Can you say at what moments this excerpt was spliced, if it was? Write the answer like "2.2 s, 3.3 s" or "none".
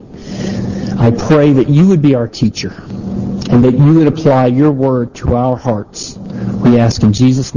none